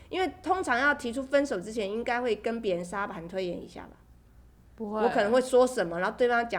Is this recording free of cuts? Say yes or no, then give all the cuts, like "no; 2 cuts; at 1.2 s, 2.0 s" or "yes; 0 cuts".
yes; 0 cuts